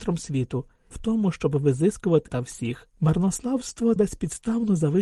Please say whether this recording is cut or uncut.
cut